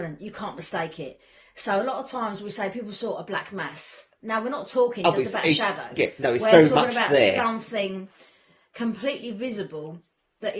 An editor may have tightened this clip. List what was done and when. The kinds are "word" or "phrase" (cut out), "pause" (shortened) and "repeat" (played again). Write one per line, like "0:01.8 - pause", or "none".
none